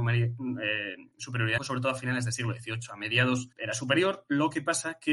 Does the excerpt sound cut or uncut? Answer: cut